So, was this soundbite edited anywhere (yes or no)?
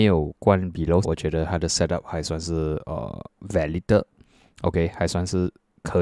yes